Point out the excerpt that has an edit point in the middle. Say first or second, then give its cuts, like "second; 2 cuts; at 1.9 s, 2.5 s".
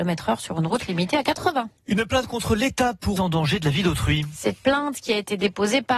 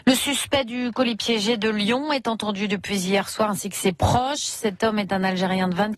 first; 2 cuts; at 3.2 s, 4.6 s